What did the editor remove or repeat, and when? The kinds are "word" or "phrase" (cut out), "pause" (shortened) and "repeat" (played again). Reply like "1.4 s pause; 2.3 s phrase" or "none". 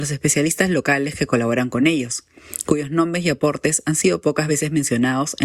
none